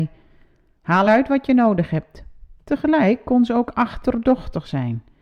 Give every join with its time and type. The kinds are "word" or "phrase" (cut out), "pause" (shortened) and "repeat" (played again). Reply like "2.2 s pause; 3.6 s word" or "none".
1.0 s phrase; 2.6 s pause